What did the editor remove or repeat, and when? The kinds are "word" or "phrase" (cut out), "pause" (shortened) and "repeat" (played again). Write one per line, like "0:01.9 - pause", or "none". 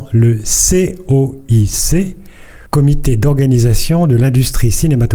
0:02.7 - pause